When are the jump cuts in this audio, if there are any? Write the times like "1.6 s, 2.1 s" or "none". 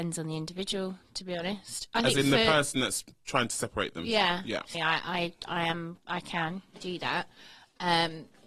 4.7 s